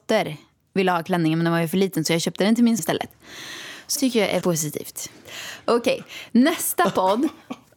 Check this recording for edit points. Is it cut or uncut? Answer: cut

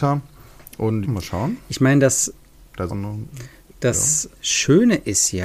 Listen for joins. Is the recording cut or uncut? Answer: cut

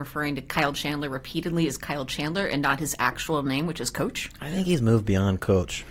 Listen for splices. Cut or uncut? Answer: uncut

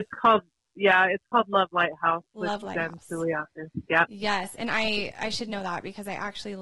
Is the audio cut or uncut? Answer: uncut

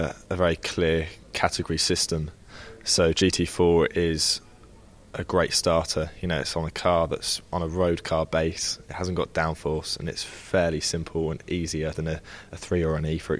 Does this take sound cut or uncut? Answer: cut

